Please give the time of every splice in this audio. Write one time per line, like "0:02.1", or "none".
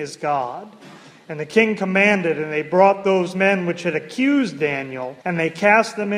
0:05.2